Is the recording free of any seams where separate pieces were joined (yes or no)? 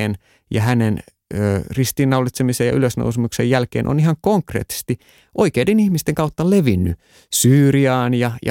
yes